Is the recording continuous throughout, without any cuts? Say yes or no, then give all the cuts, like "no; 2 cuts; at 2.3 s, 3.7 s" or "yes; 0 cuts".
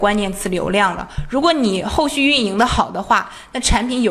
yes; 0 cuts